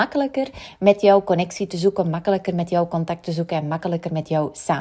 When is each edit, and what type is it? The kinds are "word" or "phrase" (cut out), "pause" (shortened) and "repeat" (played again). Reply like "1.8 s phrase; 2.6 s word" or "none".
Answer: none